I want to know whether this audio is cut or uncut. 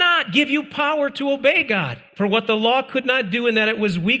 cut